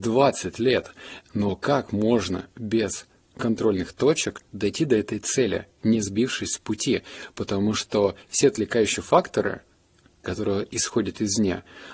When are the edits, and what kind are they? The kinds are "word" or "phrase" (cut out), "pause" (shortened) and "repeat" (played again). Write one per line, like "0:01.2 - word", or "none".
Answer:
none